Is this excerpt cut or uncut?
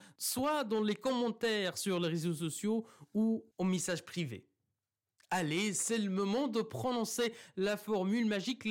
uncut